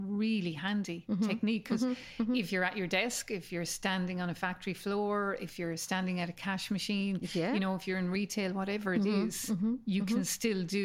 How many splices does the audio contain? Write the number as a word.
zero